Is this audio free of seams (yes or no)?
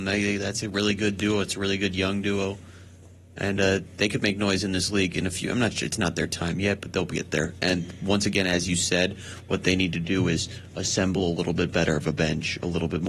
yes